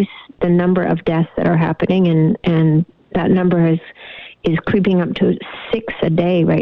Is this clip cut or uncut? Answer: uncut